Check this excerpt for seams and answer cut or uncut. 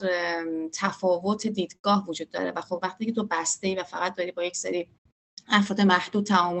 uncut